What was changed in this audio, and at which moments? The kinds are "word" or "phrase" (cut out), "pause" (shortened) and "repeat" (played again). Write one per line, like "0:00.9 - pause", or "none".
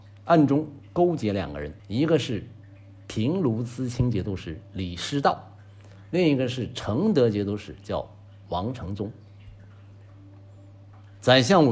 0:01.8 - pause